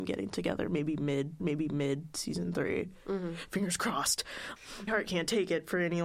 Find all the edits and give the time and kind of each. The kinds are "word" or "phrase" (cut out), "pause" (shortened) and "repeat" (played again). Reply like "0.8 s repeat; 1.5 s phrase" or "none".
1.4 s repeat; 4.6 s word; 4.9 s word